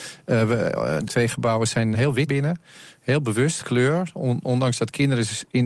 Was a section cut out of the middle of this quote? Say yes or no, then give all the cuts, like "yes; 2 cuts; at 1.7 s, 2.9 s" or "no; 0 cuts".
yes; 4 cuts; at 1.1 s, 1.9 s, 2.3 s, 3.6 s